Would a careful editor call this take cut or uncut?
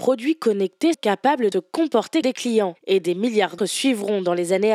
cut